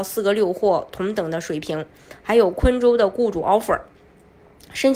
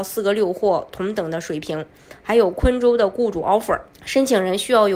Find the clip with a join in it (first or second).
second